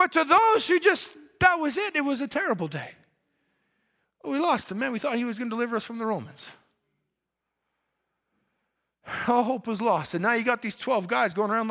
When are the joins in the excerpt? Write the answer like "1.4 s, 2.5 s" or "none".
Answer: none